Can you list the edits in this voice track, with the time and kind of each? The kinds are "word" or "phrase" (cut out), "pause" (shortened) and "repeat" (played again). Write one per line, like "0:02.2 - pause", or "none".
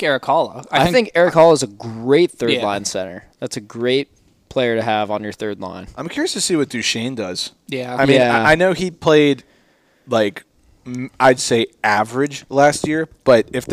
none